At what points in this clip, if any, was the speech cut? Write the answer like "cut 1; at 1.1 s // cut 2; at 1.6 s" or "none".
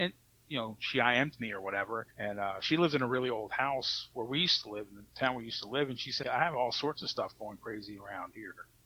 cut 1; at 2.1 s // cut 2; at 6.2 s